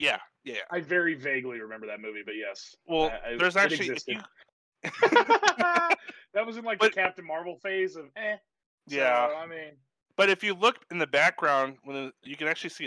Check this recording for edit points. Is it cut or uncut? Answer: uncut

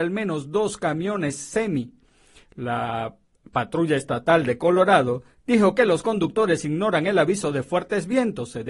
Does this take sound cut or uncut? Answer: uncut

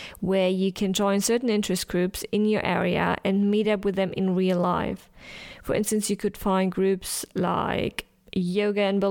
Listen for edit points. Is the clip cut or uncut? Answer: uncut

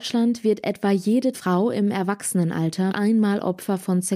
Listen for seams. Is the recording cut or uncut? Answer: cut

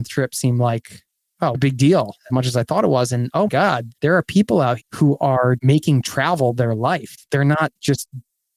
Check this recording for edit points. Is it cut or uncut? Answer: cut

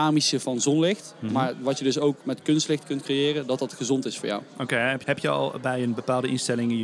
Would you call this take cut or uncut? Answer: cut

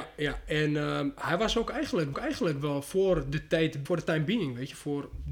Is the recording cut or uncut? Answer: cut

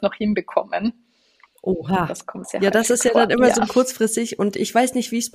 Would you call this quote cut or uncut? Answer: cut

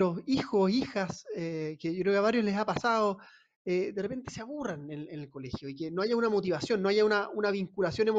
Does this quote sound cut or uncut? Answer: uncut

